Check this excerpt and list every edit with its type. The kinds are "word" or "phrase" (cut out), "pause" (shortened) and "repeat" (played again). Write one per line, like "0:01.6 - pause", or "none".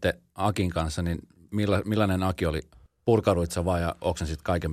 none